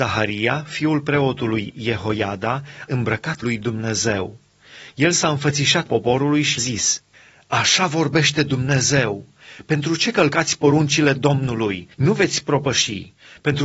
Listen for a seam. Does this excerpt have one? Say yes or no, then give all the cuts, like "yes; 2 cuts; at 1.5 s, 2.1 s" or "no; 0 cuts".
yes; 6 cuts; at 2.9 s, 3.4 s, 5.9 s, 6.6 s, 7.1 s, 11.9 s